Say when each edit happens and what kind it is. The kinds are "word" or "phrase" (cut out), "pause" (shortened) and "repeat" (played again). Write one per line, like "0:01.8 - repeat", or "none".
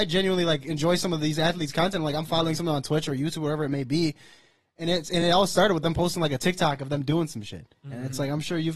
none